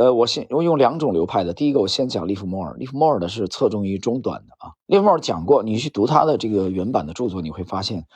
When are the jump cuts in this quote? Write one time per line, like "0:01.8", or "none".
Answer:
0:04.8